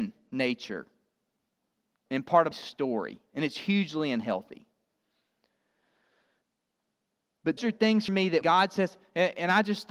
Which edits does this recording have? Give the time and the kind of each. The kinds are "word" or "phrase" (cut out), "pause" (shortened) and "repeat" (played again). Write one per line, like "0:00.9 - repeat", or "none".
0:02.5 - word
0:07.6 - word
0:08.1 - word
0:08.4 - word